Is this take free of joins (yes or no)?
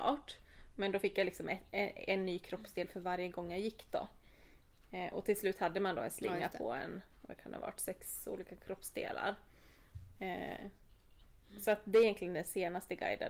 yes